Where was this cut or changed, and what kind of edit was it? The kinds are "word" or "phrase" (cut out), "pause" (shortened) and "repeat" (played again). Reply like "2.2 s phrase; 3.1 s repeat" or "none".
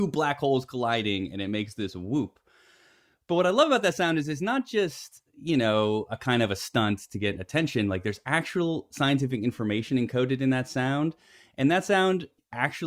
none

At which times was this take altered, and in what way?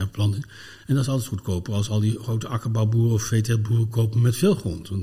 none

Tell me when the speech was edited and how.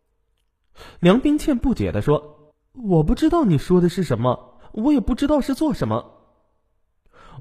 2.5 s pause

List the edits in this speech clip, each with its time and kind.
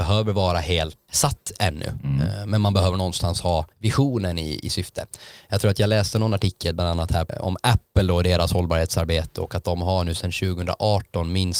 1.1 s word; 3.7 s pause; 4.6 s word

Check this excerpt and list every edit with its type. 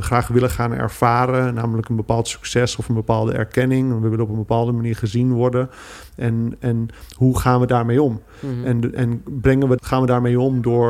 9.8 s word

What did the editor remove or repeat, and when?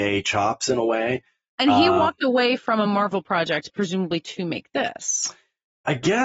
none

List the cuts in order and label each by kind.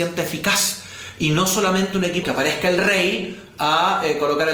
2.2 s phrase

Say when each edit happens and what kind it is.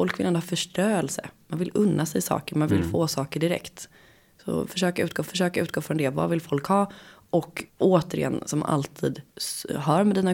5.2 s repeat; 7.7 s pause; 9.3 s pause

